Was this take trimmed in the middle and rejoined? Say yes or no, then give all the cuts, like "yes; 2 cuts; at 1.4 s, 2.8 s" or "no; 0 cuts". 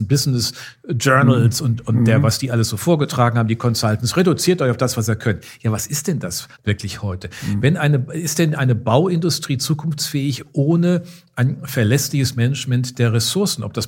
yes; 1 cut; at 6.5 s